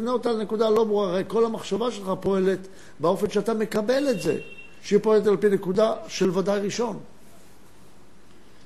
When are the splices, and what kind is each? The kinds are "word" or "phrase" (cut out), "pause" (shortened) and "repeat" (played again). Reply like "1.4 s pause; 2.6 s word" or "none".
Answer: none